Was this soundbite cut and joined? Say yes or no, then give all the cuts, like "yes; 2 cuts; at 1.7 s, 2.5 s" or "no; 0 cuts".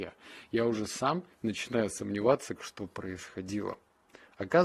yes; 1 cut; at 2.6 s